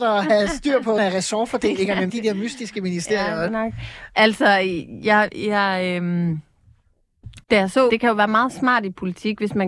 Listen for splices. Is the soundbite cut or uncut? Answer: cut